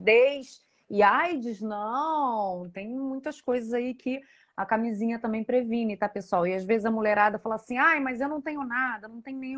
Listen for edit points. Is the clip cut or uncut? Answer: uncut